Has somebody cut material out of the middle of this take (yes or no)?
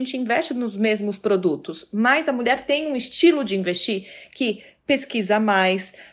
no